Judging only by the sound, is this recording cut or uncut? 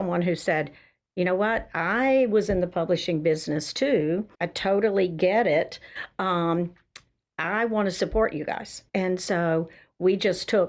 cut